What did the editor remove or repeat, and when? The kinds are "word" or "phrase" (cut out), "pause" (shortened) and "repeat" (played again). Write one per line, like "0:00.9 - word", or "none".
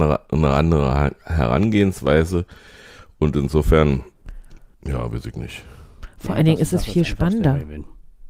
0:04.7 - pause

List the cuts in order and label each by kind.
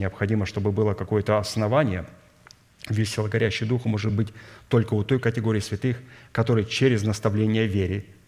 none

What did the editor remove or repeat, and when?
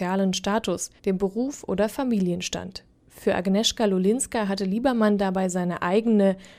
0:01.0 - pause

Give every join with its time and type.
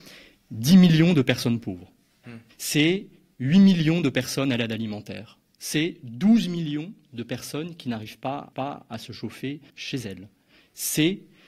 0:02.5 - pause
0:08.5 - repeat
0:09.7 - pause

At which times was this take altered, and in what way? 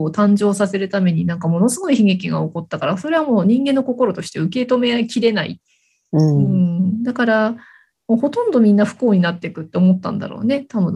none

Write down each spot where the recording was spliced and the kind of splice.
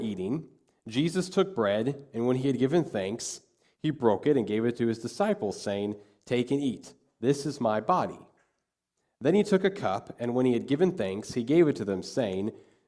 none

